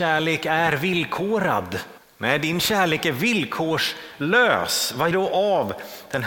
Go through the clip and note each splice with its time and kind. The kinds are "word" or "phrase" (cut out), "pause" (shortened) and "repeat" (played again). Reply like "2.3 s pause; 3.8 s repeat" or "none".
2.0 s pause; 5.1 s phrase